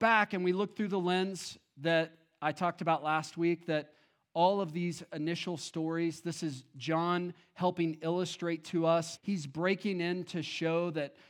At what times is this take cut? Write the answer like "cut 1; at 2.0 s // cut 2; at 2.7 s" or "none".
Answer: cut 1; at 9.2 s

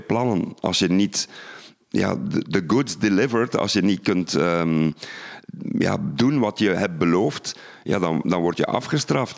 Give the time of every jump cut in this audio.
none

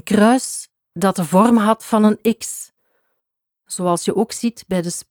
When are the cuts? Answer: none

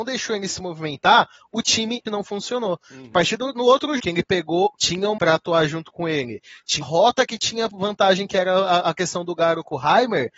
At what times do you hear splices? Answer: cut 1; at 2.1 s // cut 2; at 3.1 s // cut 3; at 4.0 s // cut 4; at 4.7 s // cut 5; at 5.2 s // cut 6; at 6.8 s

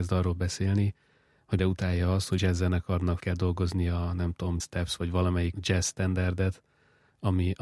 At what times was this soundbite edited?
cut 1; at 1.6 s // cut 2; at 2.4 s // cut 3; at 3.2 s // cut 4; at 4.6 s // cut 5; at 5.5 s

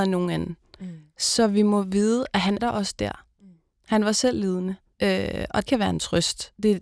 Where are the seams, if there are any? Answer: cut 1; at 2.6 s // cut 2; at 4.9 s // cut 3; at 5.7 s

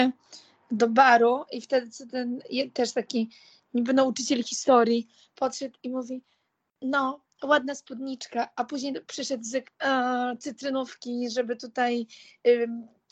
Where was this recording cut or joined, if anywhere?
cut 1; at 9.6 s

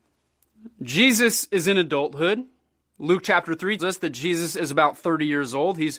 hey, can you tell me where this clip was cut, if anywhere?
cut 1; at 3.8 s

